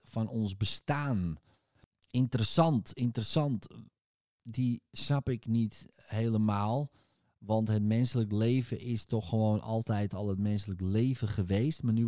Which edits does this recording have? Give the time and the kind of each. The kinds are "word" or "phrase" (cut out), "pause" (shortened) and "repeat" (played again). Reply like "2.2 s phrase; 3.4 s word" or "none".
none